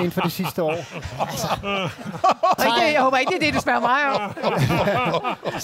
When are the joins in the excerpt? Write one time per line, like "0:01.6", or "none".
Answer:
0:02.6